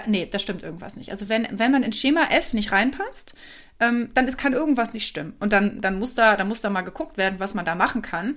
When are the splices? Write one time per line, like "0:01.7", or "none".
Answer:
none